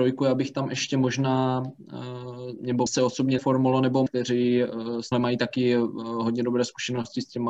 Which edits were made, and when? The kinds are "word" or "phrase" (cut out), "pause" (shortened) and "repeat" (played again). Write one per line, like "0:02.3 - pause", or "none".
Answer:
0:02.9 - word
0:03.4 - phrase
0:04.1 - phrase
0:05.1 - word

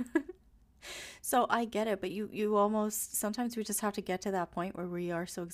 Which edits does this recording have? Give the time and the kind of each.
none

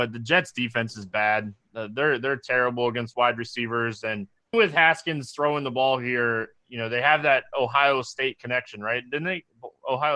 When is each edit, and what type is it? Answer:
0:04.5 - word

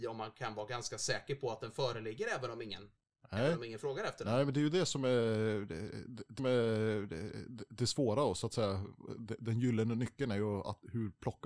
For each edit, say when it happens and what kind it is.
0:06.4 - repeat

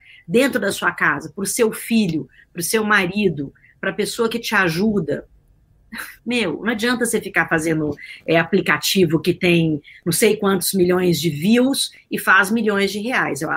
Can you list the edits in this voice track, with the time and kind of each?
0:06.2 - pause

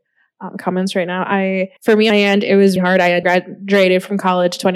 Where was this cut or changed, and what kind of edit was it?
0:01.8 - pause
0:02.1 - phrase
0:02.8 - word
0:03.2 - phrase

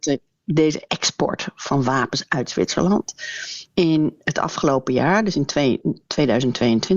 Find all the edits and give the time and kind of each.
none

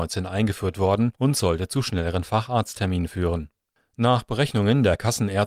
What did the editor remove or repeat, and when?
0:01.2 - pause

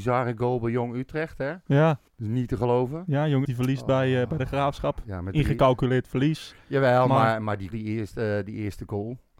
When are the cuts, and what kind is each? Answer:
0:02.1 - pause
0:03.4 - word
0:07.7 - word

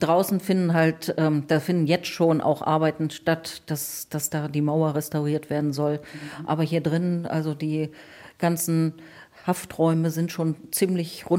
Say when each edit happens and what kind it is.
none

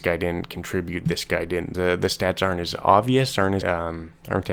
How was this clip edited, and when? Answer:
0:01.7 - phrase
0:03.6 - word

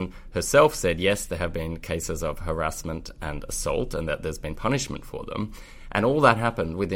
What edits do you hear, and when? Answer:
none

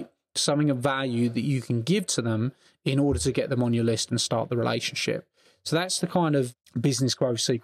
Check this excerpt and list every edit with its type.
none

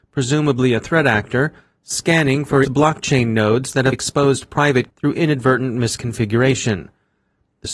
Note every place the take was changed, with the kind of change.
0:02.6 - word
0:03.9 - word
0:04.9 - word

